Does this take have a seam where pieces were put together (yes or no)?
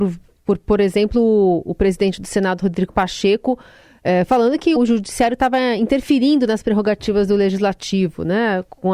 yes